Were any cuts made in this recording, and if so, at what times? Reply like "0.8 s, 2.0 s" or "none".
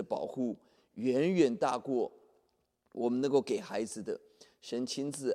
none